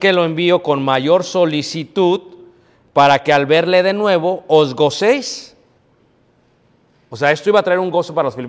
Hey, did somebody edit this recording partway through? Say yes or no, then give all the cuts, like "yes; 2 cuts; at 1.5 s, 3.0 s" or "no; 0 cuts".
no; 0 cuts